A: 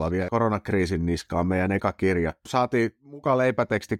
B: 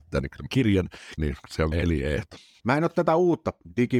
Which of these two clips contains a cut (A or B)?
B